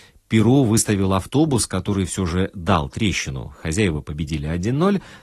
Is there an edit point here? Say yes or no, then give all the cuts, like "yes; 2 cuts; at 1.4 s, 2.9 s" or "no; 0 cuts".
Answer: no; 0 cuts